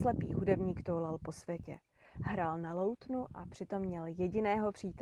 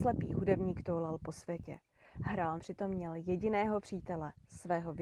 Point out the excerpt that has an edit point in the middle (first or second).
second